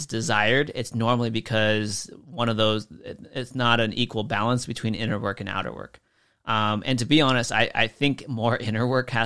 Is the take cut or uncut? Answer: uncut